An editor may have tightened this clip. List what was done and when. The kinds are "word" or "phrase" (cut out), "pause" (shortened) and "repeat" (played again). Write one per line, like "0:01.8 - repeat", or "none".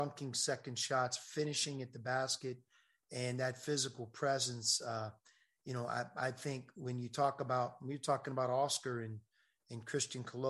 none

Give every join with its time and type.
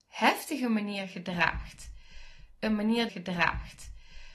0:03.1 - repeat

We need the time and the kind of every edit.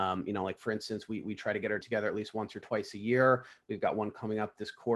0:01.8 - word

